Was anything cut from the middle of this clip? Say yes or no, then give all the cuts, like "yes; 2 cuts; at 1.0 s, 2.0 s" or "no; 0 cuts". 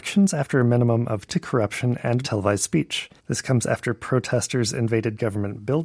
yes; 3 cuts; at 1.3 s, 2.2 s, 3.2 s